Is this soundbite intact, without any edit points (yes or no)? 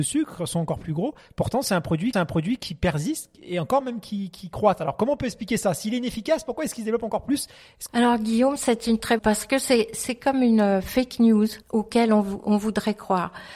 no